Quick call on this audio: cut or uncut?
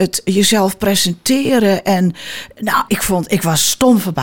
cut